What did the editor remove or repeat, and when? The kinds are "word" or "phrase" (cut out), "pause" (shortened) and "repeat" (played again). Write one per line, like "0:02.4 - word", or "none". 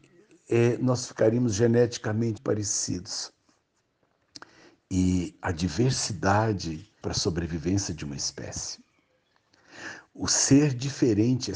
0:02.4 - word
0:07.0 - phrase

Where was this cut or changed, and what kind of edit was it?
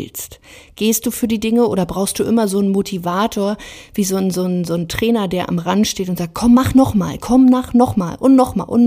none

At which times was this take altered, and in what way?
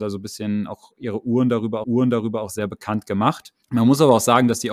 0:01.8 - repeat
0:03.6 - pause

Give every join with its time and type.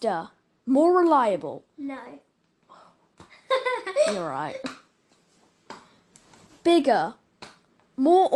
none

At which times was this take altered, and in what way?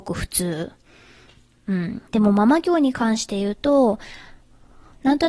0:02.1 - pause

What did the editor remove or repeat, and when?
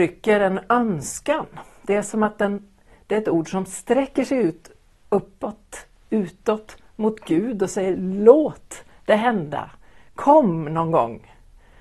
none

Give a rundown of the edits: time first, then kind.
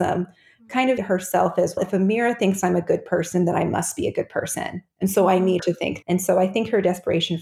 0:01.0 - word
0:01.8 - word
0:05.6 - word
0:06.0 - word

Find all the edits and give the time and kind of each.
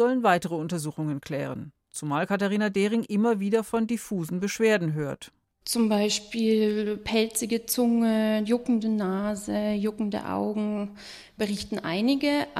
none

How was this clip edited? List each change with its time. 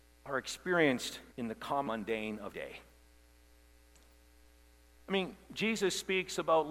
0:01.3 - pause
0:01.9 - word
0:02.5 - word

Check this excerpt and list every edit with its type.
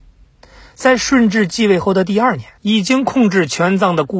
0:02.6 - pause

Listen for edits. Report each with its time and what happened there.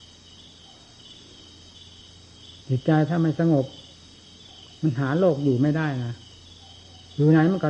0:02.6 - pause

